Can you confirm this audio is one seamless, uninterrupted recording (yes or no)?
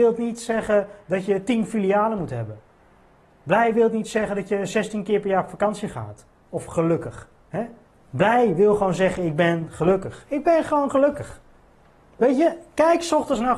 no